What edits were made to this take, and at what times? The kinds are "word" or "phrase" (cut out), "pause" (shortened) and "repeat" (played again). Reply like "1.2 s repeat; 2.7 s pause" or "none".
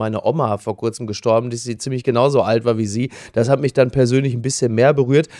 none